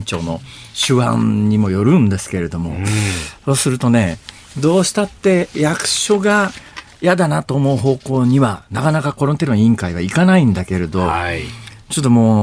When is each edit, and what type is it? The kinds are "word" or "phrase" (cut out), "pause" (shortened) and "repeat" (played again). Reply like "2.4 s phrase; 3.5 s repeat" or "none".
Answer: none